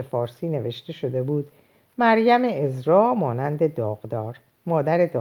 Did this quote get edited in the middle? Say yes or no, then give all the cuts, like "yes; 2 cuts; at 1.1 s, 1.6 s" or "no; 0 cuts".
no; 0 cuts